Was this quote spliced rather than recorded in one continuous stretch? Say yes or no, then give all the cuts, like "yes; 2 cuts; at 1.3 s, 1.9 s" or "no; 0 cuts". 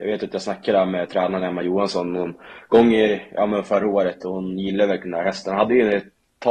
no; 0 cuts